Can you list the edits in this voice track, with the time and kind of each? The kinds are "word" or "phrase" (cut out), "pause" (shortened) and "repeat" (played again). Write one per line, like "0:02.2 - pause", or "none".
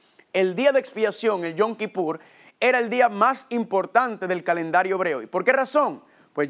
none